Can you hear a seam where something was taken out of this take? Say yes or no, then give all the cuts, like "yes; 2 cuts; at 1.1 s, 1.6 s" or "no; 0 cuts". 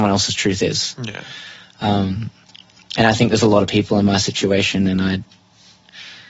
no; 0 cuts